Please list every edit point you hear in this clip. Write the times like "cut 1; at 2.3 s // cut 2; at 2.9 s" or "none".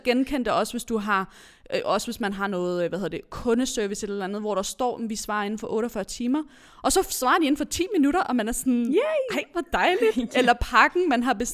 none